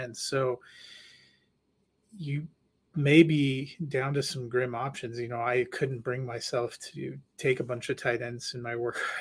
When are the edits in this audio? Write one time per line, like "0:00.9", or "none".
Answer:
none